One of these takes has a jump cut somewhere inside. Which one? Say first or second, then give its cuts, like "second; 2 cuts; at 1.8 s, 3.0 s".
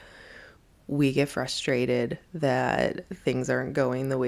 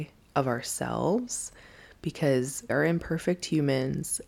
second; 1 cut; at 2.7 s